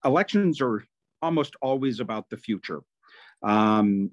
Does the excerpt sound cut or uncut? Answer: uncut